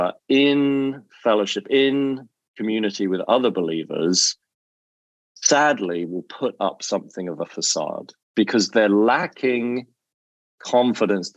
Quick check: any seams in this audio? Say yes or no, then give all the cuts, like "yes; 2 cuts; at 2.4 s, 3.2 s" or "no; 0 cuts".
yes; 1 cut; at 8.2 s